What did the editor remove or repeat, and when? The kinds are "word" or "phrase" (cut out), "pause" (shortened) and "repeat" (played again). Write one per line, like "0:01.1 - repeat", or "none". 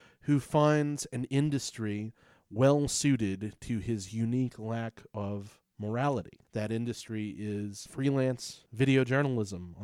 0:07.9 - word